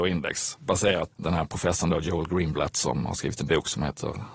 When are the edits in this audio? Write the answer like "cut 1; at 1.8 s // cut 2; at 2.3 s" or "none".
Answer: cut 1; at 1.1 s